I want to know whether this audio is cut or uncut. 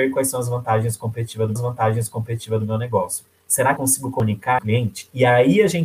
cut